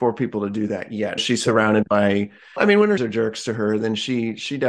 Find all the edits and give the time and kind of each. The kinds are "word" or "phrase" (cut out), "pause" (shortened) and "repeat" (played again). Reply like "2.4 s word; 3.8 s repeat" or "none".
1.2 s word; 2.6 s word; 3.0 s word